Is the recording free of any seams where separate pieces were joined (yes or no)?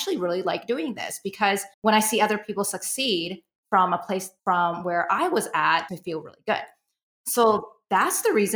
no